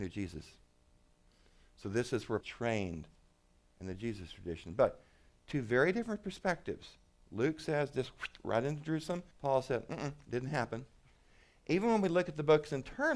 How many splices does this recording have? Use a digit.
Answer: 2